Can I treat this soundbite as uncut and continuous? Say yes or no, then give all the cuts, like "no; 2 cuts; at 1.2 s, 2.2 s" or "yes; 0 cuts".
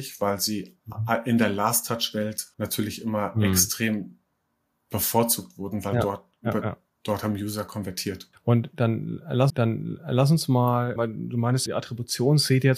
no; 4 cuts; at 2.5 s, 9.5 s, 11.0 s, 11.7 s